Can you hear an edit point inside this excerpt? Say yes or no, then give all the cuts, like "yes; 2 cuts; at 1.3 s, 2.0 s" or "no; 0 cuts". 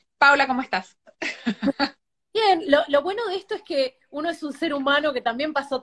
no; 0 cuts